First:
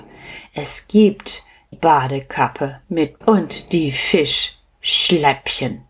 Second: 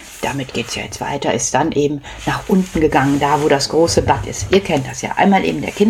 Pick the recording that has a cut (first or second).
first